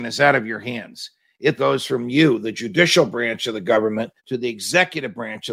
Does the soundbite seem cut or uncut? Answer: cut